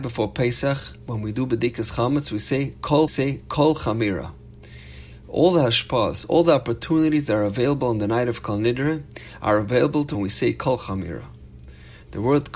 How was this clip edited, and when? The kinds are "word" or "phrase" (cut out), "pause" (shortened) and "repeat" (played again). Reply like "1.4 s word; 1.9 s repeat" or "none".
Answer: 3.1 s repeat; 10.1 s phrase